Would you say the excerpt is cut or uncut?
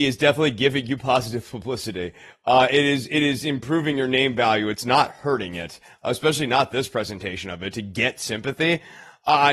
uncut